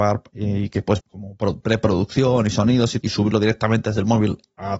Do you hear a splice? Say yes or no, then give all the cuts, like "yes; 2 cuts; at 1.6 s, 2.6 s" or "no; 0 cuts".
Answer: yes; 2 cuts; at 1.0 s, 3.0 s